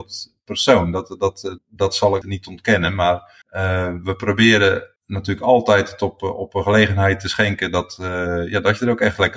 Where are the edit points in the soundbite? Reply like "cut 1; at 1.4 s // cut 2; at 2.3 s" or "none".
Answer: cut 1; at 1.6 s // cut 2; at 2.2 s // cut 3; at 3.4 s // cut 4; at 5.0 s